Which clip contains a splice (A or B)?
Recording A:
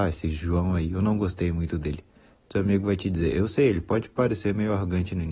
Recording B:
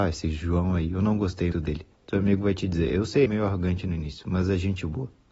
B